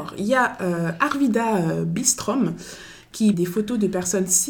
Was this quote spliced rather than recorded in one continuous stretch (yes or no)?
yes